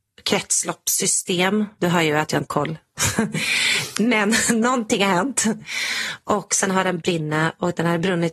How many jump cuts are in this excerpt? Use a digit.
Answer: 3